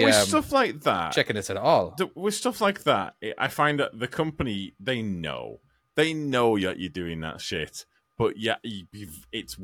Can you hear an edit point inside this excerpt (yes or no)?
no